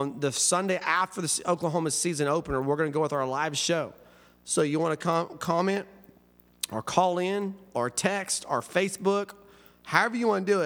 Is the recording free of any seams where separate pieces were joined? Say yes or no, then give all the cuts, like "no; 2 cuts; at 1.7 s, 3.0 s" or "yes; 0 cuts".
yes; 0 cuts